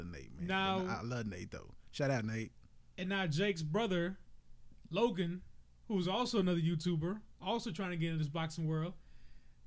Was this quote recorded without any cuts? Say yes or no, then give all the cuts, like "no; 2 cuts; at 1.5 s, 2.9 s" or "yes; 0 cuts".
yes; 0 cuts